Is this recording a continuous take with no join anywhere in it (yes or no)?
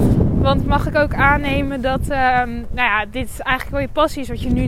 yes